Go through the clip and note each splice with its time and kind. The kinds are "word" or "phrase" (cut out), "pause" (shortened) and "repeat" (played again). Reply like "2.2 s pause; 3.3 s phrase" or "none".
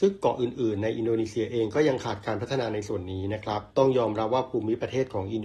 3.7 s pause